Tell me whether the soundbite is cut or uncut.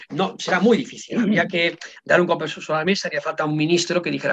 uncut